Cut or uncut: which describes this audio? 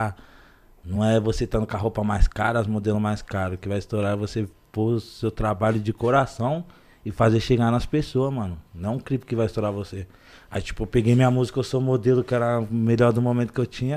uncut